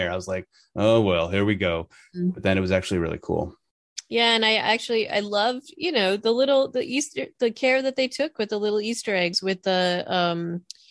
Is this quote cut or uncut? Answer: uncut